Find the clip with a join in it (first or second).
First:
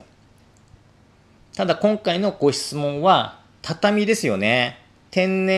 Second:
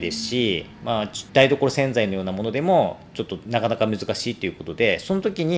second